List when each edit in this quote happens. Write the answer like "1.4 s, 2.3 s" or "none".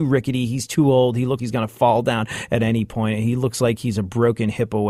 1.4 s

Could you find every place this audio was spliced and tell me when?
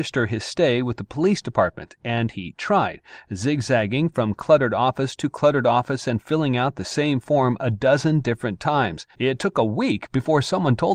9.1 s

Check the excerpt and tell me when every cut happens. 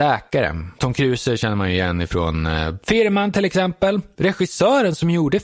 none

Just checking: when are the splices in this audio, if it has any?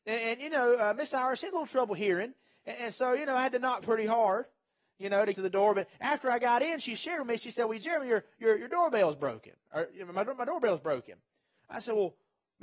5.3 s

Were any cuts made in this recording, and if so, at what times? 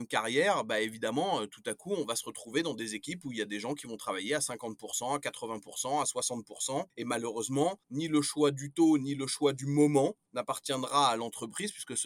none

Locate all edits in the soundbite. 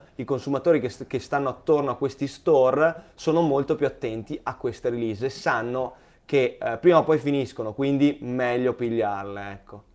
none

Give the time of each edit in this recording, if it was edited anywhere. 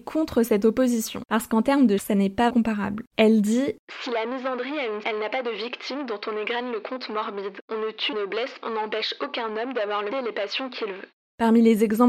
2.0 s, 2.5 s, 5.0 s, 8.1 s, 8.6 s, 10.1 s

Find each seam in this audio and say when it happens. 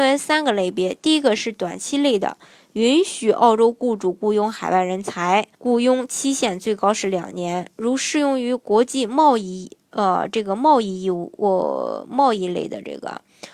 5.5 s

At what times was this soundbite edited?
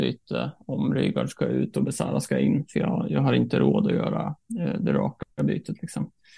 5.3 s

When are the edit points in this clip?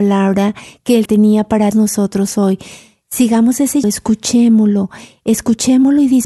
1.1 s, 1.7 s, 3.8 s

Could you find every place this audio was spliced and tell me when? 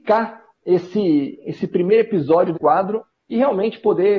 2.5 s

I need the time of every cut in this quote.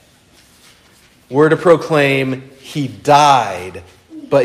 none

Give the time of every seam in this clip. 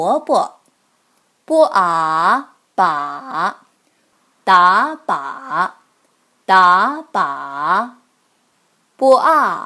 none

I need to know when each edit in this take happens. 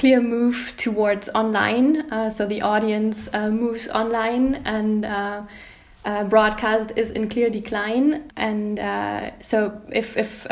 8.3 s

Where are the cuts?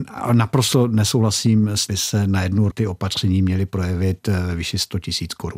1.9 s, 2.7 s

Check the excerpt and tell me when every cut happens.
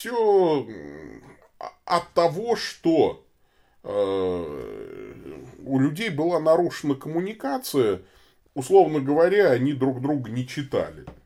8.5 s

